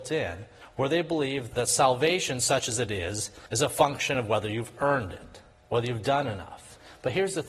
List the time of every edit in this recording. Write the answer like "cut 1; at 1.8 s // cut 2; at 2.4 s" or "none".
none